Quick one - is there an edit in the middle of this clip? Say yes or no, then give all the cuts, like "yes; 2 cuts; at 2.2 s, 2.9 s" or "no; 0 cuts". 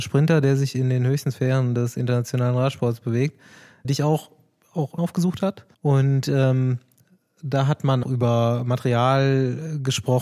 yes; 4 cuts; at 3.8 s, 5.0 s, 5.7 s, 8.0 s